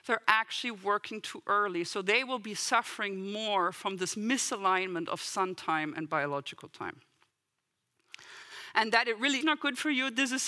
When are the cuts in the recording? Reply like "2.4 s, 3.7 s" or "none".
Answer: 9.4 s